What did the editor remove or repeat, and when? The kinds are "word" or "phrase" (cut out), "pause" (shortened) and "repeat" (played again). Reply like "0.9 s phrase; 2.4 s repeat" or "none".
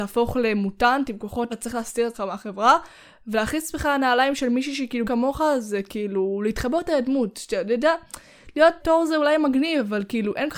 1.5 s word; 2.1 s word; 5.0 s word; 8.8 s word